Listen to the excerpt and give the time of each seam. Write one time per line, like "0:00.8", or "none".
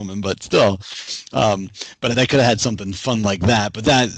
0:02.1